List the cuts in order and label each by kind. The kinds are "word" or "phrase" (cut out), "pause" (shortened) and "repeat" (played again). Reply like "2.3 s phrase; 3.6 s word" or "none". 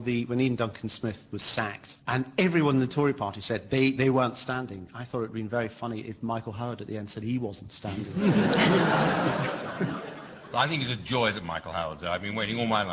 2.0 s pause